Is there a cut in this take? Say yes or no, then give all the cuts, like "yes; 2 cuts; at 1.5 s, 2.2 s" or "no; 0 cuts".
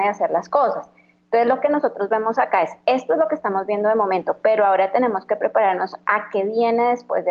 no; 0 cuts